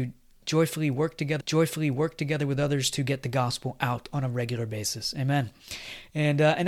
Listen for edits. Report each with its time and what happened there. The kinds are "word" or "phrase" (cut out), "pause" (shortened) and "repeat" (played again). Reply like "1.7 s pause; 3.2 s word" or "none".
1.4 s repeat